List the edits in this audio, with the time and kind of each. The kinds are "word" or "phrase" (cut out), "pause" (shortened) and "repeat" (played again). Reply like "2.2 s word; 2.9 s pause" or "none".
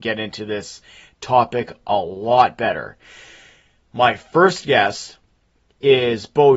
none